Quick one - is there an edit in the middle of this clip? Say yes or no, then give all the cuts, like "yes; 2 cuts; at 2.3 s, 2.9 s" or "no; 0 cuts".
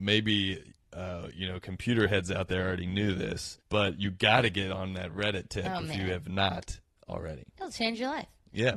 yes; 2 cuts; at 3.6 s, 6.8 s